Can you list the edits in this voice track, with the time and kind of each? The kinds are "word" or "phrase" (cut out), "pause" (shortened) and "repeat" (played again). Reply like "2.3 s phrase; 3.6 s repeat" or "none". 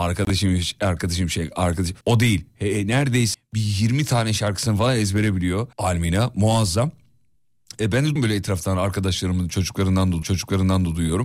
2.0 s pause; 3.3 s word; 5.7 s pause; 8.2 s word; 10.2 s repeat